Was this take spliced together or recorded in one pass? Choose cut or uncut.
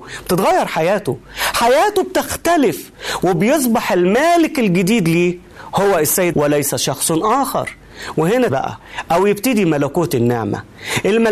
cut